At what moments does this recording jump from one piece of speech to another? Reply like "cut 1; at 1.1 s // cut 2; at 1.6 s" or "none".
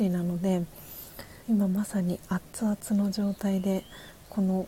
cut 1; at 1.4 s